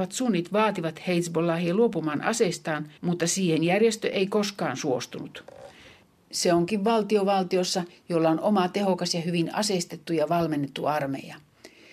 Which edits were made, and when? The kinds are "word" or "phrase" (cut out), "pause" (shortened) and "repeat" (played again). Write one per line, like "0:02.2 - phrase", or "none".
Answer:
0:03.0 - pause